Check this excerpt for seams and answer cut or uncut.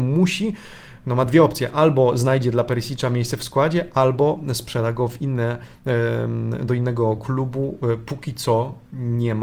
uncut